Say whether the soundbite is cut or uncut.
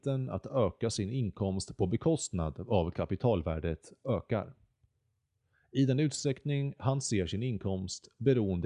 uncut